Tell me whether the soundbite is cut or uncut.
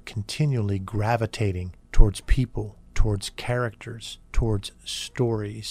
cut